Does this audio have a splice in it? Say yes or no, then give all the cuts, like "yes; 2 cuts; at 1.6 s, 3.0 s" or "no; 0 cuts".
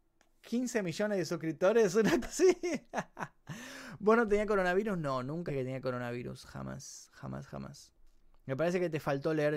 yes; 2 cuts; at 2.2 s, 5.5 s